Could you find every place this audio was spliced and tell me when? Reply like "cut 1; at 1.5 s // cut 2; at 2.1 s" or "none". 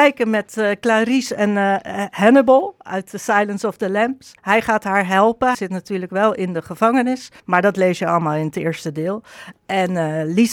cut 1; at 4.4 s // cut 2; at 5.5 s // cut 3; at 7.4 s